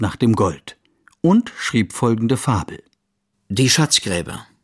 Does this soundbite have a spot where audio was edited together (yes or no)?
no